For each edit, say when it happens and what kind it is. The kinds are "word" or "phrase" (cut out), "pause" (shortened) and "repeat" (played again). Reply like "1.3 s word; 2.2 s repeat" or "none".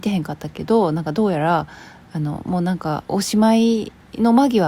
3.1 s pause